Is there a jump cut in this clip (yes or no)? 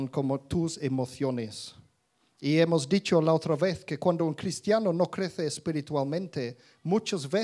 no